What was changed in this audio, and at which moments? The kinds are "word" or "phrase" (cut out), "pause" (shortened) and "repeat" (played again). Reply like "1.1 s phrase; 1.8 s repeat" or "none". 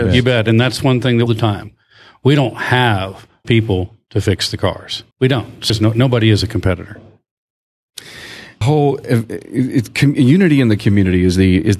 1.3 s phrase; 3.4 s word; 5.1 s pause; 5.7 s word; 8.6 s word